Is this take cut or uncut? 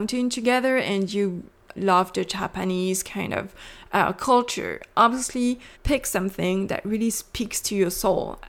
cut